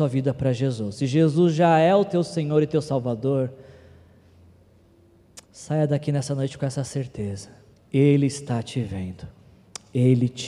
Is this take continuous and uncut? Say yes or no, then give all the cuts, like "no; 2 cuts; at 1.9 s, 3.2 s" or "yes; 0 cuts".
no; 2 cuts; at 5.4 s, 7.7 s